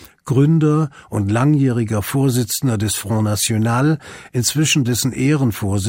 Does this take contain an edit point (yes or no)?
no